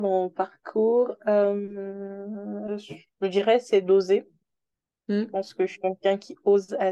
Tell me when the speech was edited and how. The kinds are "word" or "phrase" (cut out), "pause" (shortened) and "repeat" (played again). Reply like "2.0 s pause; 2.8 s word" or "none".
none